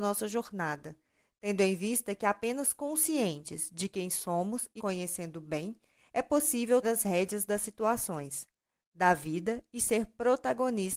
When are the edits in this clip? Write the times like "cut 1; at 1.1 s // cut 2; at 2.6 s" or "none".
cut 1; at 4.8 s // cut 2; at 6.8 s